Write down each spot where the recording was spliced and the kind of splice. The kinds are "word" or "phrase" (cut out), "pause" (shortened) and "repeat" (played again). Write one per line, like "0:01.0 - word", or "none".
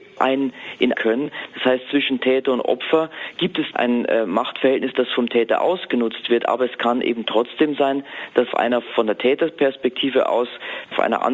0:00.9 - phrase
0:08.5 - word